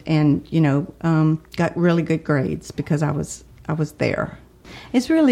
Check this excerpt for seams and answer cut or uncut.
cut